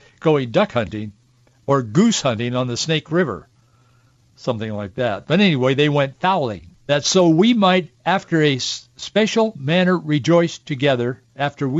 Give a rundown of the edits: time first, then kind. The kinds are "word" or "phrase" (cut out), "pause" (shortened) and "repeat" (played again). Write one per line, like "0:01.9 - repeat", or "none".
0:06.8 - pause